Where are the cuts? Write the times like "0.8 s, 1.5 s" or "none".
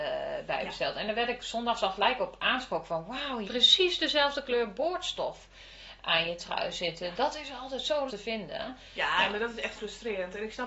3.4 s, 8.1 s, 9.8 s